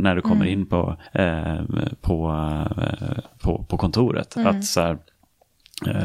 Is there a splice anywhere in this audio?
yes; 1 cut; at 1.1 s

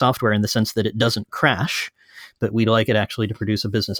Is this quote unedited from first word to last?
yes; 0 cuts

